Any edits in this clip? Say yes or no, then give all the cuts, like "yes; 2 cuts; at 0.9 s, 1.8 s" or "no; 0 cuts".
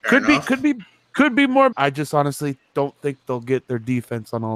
yes; 1 cut; at 1.7 s